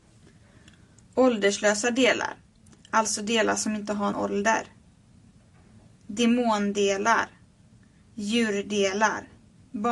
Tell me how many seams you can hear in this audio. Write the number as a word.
one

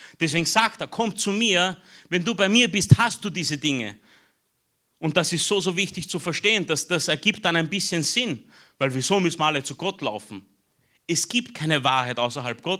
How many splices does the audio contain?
zero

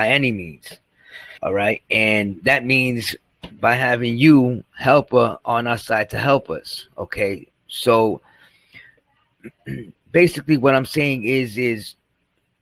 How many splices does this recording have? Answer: one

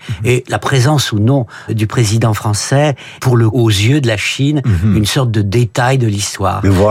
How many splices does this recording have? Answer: three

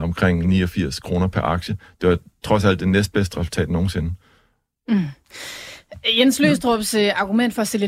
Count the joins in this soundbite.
zero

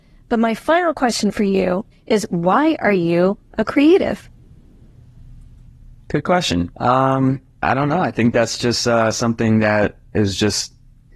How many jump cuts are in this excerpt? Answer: one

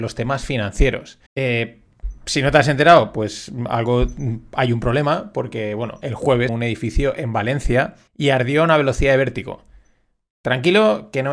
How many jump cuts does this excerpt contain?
three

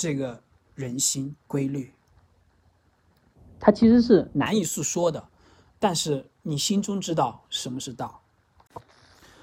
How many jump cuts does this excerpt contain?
one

